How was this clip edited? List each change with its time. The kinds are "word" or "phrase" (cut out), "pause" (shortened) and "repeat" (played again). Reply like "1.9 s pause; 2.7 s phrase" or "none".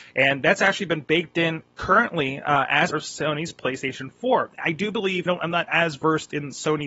2.9 s word; 5.3 s phrase; 5.7 s word